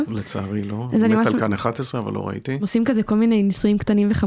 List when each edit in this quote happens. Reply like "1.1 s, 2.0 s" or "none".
none